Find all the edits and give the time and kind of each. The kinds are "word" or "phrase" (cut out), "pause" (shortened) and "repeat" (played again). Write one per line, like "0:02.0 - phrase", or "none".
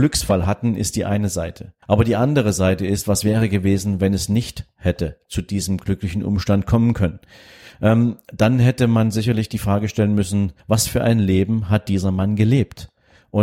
0:01.8 - pause
0:10.6 - pause

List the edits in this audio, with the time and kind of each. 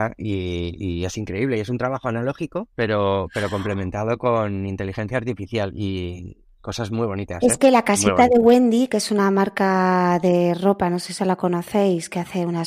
0:02.7 - pause

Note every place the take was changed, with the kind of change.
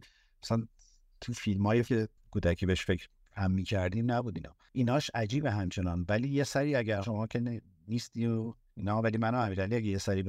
0:01.9 - word
0:07.0 - word

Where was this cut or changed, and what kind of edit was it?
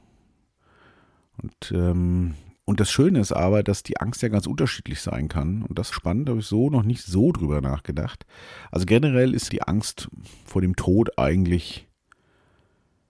0:02.6 - pause
0:05.9 - phrase
0:09.5 - word

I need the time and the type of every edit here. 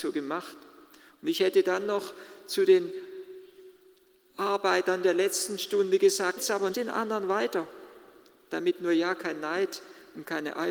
0:06.4 - word
0:06.7 - word

